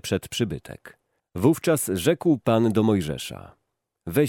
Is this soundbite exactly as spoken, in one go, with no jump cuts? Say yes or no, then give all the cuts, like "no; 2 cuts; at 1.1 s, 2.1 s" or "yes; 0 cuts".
no; 1 cut; at 1.2 s